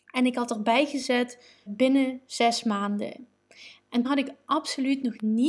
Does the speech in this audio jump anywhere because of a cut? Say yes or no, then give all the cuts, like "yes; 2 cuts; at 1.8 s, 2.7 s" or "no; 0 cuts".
yes; 2 cuts; at 1.7 s, 4.0 s